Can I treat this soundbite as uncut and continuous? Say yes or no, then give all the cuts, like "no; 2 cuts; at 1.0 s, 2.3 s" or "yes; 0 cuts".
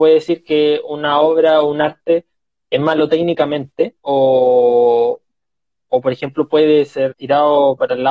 no; 2 cuts; at 4.0 s, 7.1 s